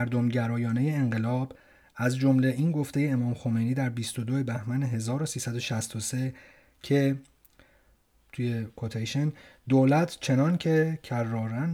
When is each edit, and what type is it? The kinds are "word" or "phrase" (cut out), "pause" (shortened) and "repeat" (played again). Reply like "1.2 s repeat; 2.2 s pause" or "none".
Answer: none